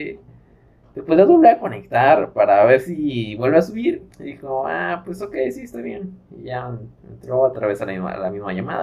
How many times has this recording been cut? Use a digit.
2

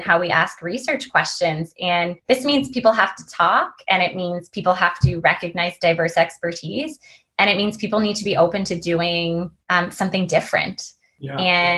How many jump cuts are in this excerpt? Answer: 2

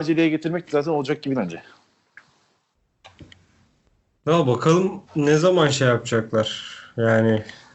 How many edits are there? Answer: 2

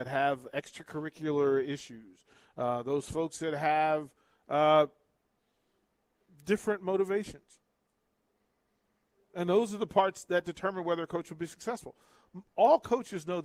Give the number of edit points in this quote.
0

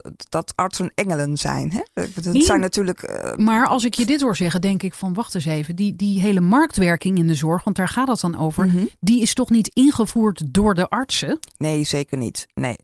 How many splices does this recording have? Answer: 1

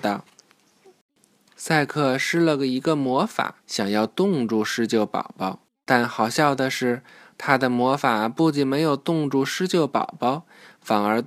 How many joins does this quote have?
2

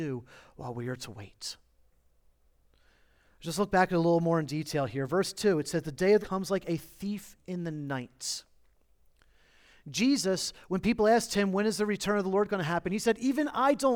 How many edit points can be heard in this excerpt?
1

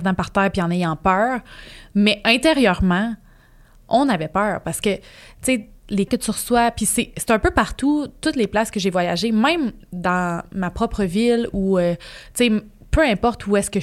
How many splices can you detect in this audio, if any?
1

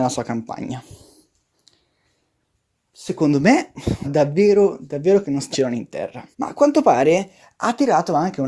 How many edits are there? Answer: 3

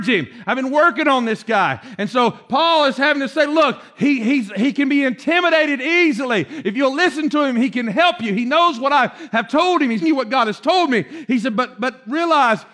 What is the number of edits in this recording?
2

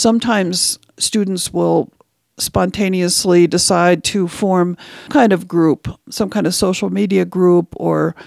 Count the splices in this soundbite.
1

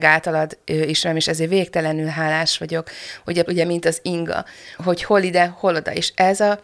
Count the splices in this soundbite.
2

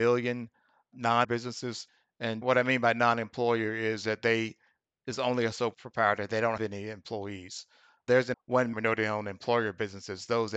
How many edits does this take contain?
4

